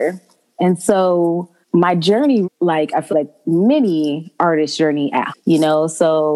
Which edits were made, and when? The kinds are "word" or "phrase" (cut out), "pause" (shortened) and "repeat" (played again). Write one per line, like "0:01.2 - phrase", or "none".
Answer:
0:01.6 - pause
0:02.4 - phrase
0:03.1 - word
0:05.3 - word